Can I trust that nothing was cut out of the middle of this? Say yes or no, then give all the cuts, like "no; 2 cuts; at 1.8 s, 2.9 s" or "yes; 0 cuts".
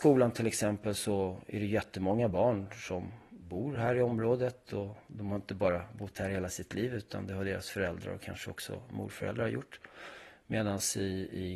yes; 0 cuts